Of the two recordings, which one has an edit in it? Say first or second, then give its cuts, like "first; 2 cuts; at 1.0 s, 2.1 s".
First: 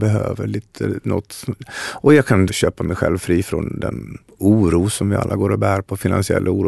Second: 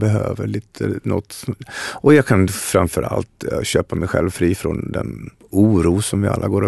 first; 1 cut; at 2.5 s